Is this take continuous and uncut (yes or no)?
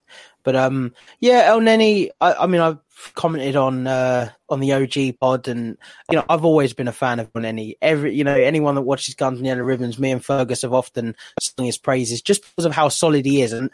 yes